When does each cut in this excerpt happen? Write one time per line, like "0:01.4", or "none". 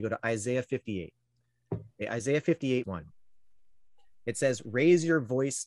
0:02.8

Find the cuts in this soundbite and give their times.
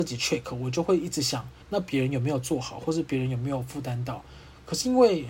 0:01.6

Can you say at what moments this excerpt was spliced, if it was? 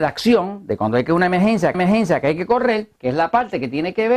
0:01.7
0:03.0

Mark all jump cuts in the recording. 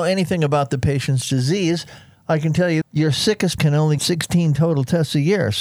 0:02.8
0:03.6
0:04.0

